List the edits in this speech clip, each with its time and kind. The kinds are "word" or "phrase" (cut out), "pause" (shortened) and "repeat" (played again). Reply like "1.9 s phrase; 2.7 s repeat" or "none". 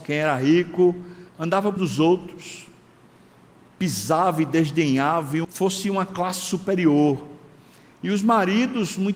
1.3 s pause; 1.8 s word; 5.4 s phrase